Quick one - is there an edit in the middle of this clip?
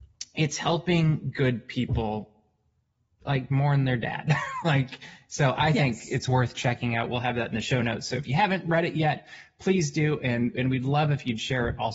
no; 0 cuts

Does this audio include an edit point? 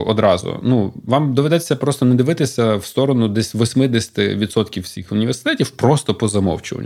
no; 0 cuts

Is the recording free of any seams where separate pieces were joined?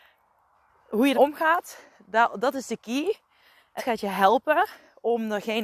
no; 2 cuts; at 1.1 s, 3.8 s

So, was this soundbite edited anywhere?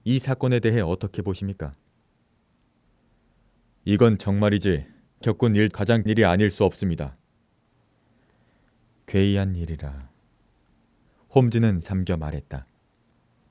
yes; 4 cuts; at 5.2 s, 5.7 s, 6.1 s, 11.8 s

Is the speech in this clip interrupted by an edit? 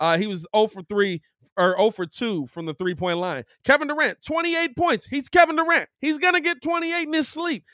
no; 0 cuts

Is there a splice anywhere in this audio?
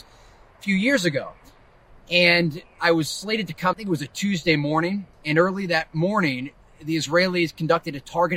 yes; 2 cuts; at 3.7 s, 5.1 s

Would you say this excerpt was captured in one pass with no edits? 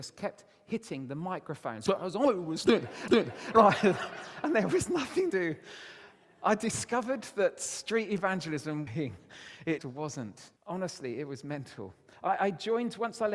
no; 5 cuts; at 3.1 s, 5.3 s, 8.9 s, 9.8 s, 10.6 s

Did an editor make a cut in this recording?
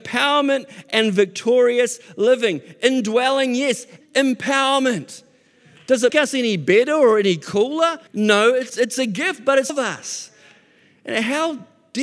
yes; 5 cuts; at 4.0 s, 6.1 s, 8.1 s, 8.7 s, 9.7 s

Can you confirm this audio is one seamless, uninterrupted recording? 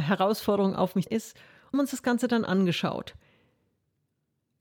no; 2 cuts; at 1.1 s, 1.7 s

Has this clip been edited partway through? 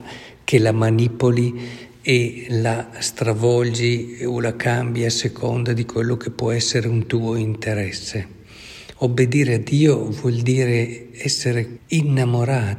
yes; 1 cut; at 11.8 s

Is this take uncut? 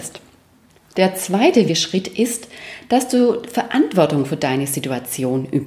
no; 1 cut; at 1.7 s

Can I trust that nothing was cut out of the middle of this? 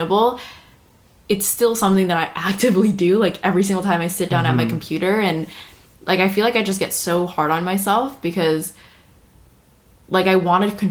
yes; 0 cuts

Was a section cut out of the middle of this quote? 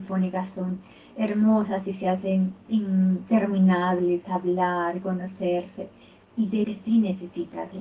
yes; 1 cut; at 6.6 s

